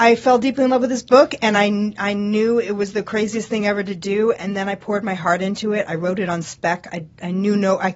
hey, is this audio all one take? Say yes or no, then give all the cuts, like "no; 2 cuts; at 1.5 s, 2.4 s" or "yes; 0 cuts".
yes; 0 cuts